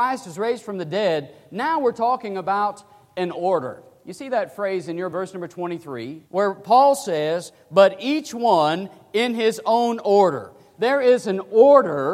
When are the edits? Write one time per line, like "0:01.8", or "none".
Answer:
0:05.1
0:06.3